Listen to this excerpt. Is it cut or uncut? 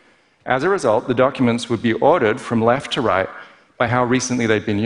uncut